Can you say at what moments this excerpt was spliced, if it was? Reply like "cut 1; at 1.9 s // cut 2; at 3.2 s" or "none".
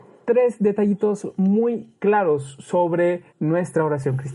cut 1; at 2.0 s // cut 2; at 3.3 s

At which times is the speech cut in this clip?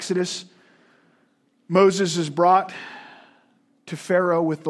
none

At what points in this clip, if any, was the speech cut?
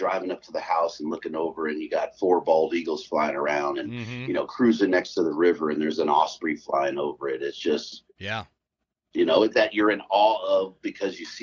cut 1; at 9.5 s

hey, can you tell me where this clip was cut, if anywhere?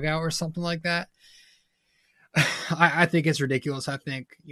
none

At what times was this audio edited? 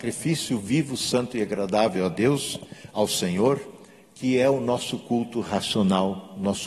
none

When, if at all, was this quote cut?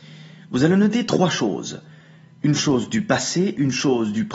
none

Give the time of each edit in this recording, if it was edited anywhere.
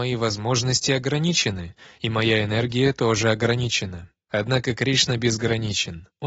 none

